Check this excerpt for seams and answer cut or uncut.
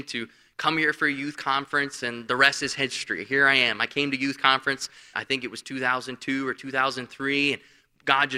cut